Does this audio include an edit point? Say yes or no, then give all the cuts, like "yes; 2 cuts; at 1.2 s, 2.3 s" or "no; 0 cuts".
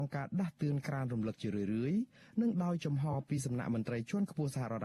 no; 0 cuts